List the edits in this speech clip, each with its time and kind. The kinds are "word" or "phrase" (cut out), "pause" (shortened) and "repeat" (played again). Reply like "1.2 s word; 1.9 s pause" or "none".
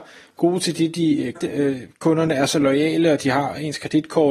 1.4 s word